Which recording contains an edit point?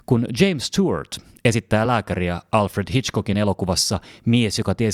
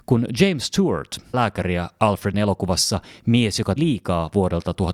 second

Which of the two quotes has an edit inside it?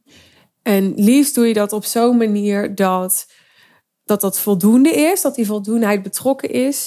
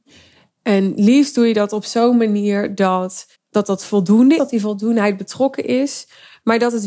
second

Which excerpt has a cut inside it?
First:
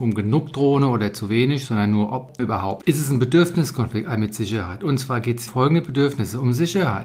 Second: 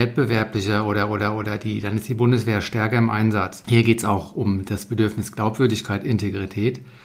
first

